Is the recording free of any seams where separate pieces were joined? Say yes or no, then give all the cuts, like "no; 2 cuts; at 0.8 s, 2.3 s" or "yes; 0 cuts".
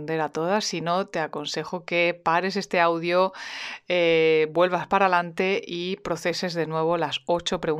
yes; 0 cuts